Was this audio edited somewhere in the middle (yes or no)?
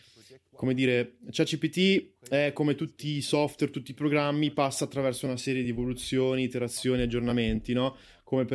no